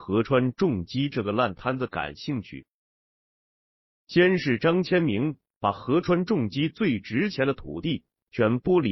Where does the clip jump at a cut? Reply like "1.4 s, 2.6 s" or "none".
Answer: none